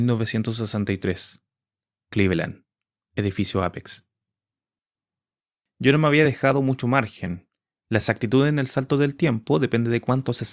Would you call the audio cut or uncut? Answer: uncut